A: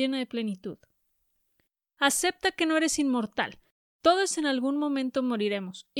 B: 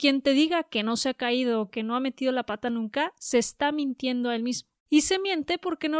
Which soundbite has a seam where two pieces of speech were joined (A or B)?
B